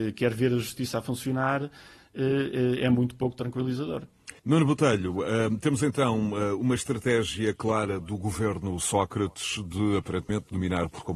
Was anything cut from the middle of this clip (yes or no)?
yes